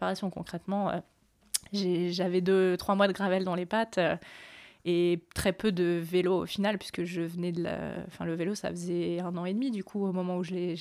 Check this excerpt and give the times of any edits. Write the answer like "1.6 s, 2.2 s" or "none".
none